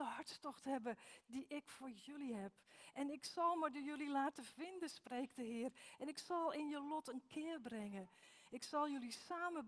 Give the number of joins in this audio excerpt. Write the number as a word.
zero